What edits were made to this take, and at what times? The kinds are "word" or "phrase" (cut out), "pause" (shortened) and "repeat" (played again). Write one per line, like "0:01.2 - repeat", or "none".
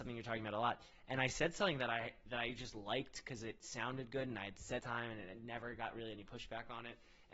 0:04.8 - phrase